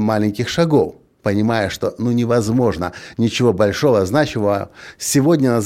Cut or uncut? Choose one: uncut